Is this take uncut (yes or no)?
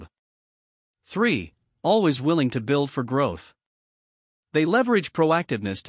yes